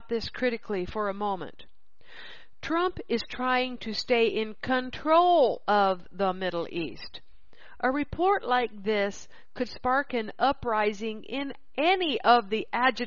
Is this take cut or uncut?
uncut